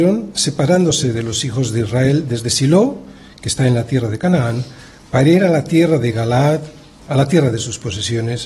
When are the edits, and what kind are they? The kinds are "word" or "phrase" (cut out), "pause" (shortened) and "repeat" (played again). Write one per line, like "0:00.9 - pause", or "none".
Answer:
none